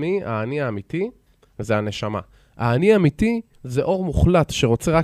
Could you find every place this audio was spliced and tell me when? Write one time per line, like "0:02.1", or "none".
0:03.5